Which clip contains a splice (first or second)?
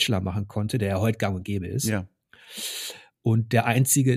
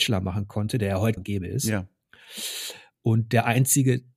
second